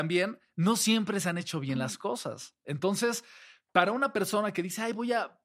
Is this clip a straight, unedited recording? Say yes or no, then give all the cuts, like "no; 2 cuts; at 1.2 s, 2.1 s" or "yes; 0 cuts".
yes; 0 cuts